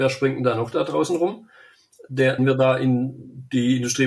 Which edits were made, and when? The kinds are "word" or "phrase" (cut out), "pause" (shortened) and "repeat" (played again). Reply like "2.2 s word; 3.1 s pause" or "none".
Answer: 2.4 s word

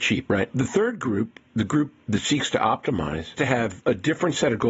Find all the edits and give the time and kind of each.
3.3 s word

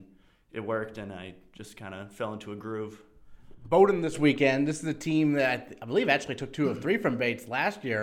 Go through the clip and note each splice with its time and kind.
none

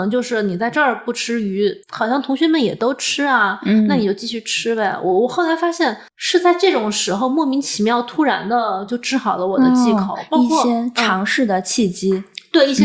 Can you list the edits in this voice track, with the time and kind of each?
1.8 s pause; 6.1 s pause

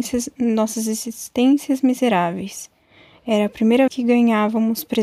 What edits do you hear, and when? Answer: 3.9 s word

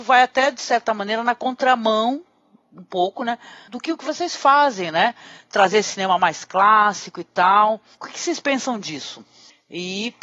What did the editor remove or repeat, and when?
none

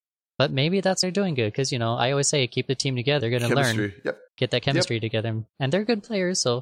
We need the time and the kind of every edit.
1.0 s word; 3.2 s word; 4.3 s pause

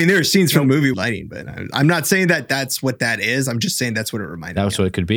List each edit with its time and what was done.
0.9 s phrase

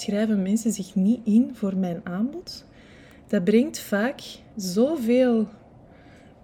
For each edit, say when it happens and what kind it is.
none

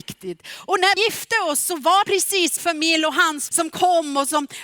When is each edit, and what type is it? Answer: 1.0 s word; 2.0 s word; 2.6 s word; 3.5 s word

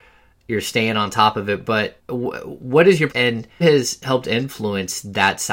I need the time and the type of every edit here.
2.0 s word; 3.1 s word; 3.6 s word

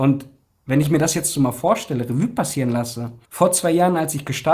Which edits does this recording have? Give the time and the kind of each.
3.2 s pause

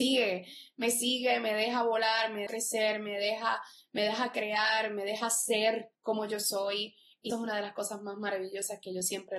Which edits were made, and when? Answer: 2.5 s word; 6.0 s pause; 7.3 s word

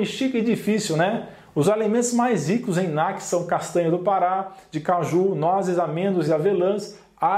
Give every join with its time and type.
none

